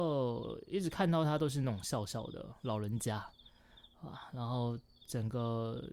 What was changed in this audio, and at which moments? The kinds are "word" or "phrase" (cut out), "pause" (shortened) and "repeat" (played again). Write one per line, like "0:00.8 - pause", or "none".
none